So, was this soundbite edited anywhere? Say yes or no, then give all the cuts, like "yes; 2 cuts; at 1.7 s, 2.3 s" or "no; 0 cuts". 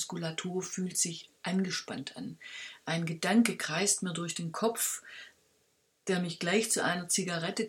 no; 0 cuts